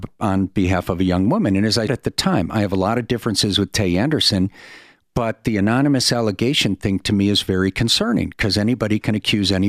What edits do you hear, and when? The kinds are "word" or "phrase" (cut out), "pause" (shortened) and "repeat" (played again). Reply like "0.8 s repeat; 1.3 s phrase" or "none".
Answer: 1.9 s word